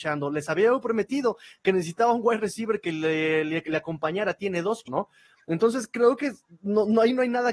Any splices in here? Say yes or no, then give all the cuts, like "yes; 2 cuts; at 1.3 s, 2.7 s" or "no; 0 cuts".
yes; 1 cut; at 4.9 s